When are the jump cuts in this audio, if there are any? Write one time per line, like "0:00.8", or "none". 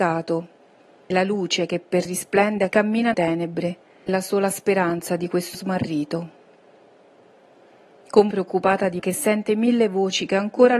0:01.1
0:02.1
0:02.7
0:03.1
0:04.1
0:05.5
0:08.3
0:09.0